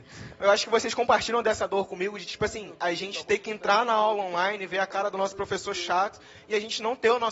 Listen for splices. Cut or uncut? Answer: uncut